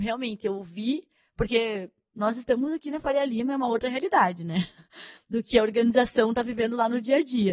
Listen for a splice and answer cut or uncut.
uncut